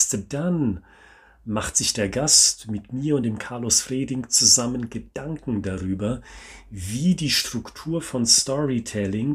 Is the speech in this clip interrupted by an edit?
no; 0 cuts

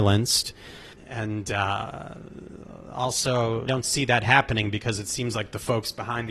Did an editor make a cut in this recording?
yes; 2 cuts; at 1.0 s, 3.7 s

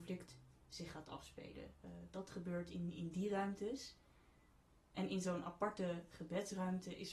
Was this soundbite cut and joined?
no; 0 cuts

